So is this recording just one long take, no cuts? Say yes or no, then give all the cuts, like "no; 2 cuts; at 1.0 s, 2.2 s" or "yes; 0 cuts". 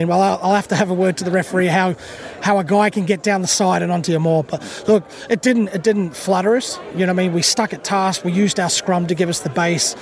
yes; 0 cuts